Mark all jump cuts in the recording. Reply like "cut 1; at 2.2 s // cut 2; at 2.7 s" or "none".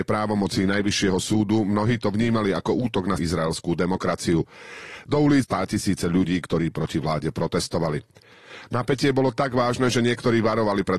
cut 1; at 3.2 s // cut 2; at 5.4 s